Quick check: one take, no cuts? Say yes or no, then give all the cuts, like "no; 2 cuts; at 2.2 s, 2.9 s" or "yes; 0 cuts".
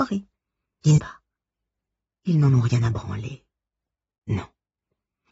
no; 1 cut; at 1.0 s